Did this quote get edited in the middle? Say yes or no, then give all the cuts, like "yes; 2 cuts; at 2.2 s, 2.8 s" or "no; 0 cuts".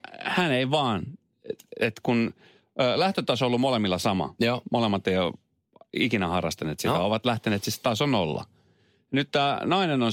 no; 0 cuts